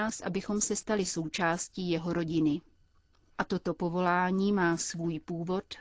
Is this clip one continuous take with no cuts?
yes; 0 cuts

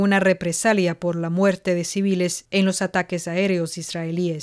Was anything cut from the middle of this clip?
no; 0 cuts

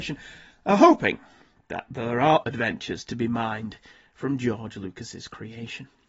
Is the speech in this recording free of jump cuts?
no; 1 cut; at 2.4 s

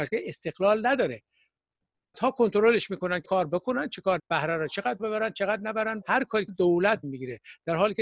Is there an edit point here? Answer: yes; 7 cuts; at 2.1 s, 3.2 s, 4.2 s, 5.0 s, 6.0 s, 6.5 s, 7.0 s

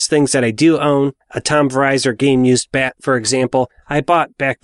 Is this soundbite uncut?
no; 1 cut; at 1.2 s

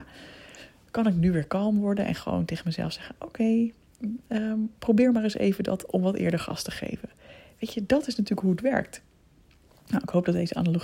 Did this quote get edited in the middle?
no; 0 cuts

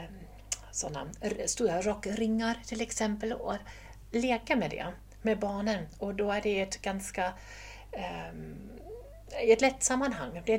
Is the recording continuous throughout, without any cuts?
yes; 0 cuts

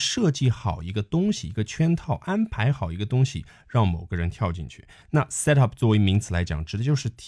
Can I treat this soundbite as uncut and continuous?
yes; 0 cuts

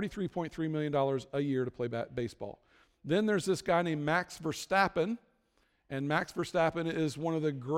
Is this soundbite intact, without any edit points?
yes; 0 cuts

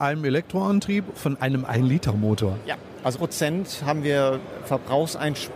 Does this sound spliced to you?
yes; 2 cuts; at 1.1 s, 3.1 s

